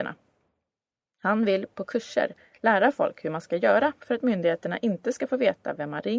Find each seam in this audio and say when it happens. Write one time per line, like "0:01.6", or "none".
none